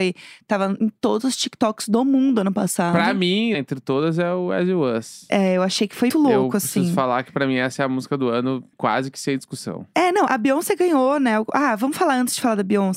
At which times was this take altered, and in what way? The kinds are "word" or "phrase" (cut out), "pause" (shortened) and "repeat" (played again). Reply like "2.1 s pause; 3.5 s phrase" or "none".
3.5 s word; 6.1 s word; 8.7 s word; 10.3 s word